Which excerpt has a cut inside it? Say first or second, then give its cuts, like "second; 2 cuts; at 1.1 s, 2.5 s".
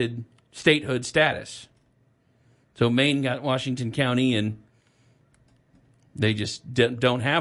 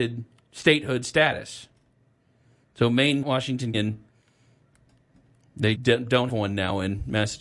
second; 4 cuts; at 3.2 s, 3.7 s, 5.7 s, 6.3 s